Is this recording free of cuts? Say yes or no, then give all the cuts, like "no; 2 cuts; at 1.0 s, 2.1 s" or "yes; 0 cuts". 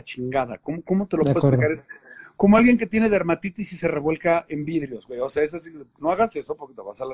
yes; 0 cuts